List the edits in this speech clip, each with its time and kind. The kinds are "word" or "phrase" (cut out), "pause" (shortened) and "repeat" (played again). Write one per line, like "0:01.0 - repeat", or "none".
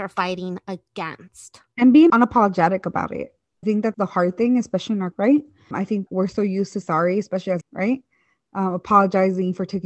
0:02.1 - word
0:03.6 - word
0:03.9 - word
0:05.1 - word
0:05.7 - word
0:06.1 - word
0:06.8 - word
0:07.6 - word